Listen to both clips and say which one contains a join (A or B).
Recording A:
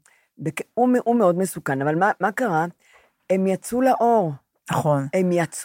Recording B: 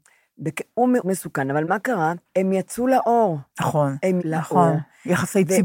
B